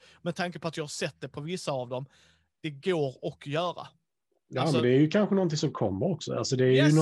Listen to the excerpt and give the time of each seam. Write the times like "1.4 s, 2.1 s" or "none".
none